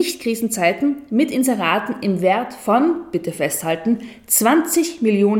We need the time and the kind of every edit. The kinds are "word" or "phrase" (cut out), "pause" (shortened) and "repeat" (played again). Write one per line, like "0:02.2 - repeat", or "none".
none